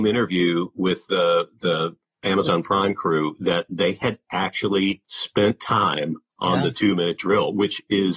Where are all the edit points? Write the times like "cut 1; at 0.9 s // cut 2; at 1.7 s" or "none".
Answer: cut 1; at 5.0 s

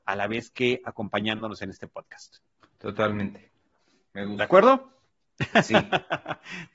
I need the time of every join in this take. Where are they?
cut 1; at 2.6 s

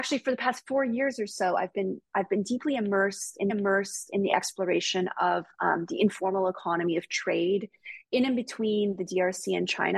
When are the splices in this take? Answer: cut 1; at 3.5 s

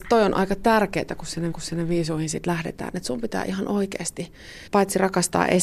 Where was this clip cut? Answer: cut 1; at 1.5 s // cut 2; at 4.7 s

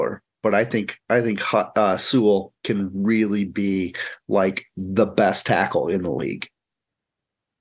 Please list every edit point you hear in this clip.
cut 1; at 2.6 s

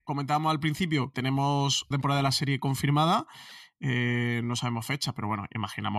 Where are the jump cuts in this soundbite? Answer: cut 1; at 1.1 s // cut 2; at 1.9 s

